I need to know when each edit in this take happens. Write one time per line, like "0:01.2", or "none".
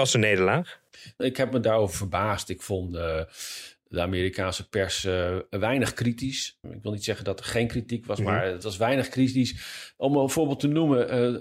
none

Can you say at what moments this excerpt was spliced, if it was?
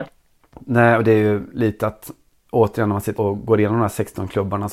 0:03.2

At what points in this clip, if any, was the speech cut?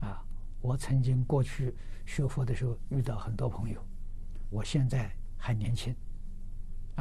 0:04.5

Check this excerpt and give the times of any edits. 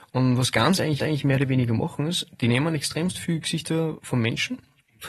0:01.0

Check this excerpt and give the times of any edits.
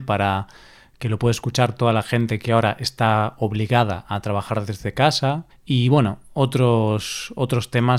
0:05.5

